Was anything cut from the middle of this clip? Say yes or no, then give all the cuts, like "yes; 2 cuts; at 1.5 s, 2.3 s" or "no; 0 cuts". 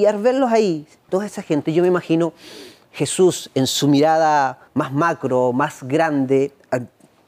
yes; 2 cuts; at 1.1 s, 4.7 s